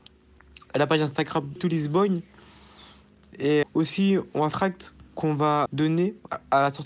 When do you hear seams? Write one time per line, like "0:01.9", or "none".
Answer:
0:01.6
0:03.6
0:04.5
0:05.1
0:05.7